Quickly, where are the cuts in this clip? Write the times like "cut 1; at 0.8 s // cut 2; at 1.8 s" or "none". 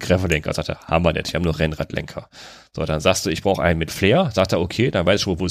none